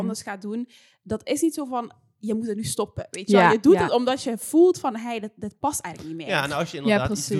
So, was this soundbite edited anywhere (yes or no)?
no